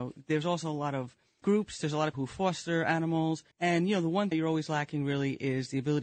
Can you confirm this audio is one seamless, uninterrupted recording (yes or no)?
no